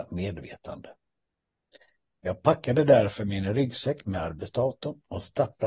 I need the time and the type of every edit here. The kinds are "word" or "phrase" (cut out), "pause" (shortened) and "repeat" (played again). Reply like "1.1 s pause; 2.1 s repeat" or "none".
none